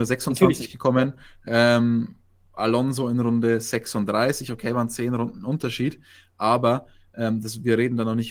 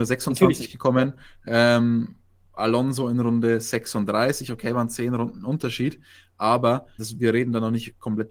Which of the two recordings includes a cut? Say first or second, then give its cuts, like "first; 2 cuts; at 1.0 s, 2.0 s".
second; 1 cut; at 7.0 s